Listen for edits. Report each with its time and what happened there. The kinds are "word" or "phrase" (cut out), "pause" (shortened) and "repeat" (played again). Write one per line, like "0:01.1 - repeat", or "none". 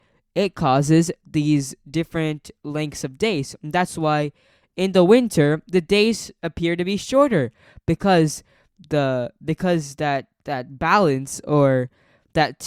none